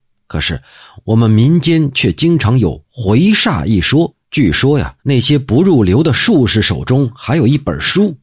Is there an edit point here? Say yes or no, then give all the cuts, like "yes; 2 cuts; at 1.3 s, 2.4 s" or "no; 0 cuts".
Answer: yes; 2 cuts; at 4.2 s, 5.0 s